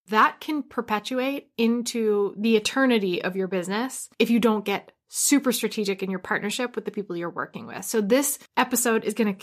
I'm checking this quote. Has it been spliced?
yes; 2 cuts; at 4.1 s, 8.5 s

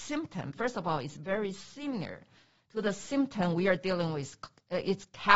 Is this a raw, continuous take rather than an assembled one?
yes; 0 cuts

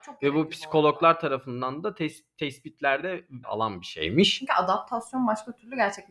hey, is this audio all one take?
no; 1 cut; at 3.4 s

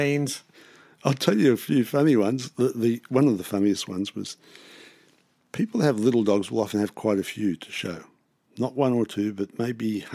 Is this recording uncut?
yes; 0 cuts

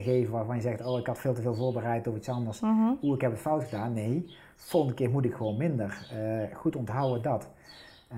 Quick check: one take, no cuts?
yes; 0 cuts

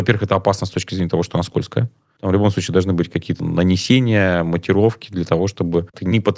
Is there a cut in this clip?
no; 0 cuts

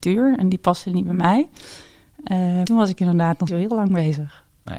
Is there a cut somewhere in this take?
yes; 2 cuts; at 2.6 s, 3.5 s

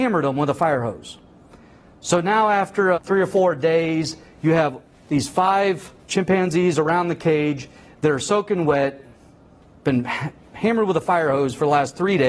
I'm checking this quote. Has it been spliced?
yes; 1 cut; at 2.9 s

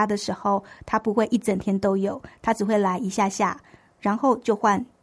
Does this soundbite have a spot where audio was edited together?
no; 0 cuts

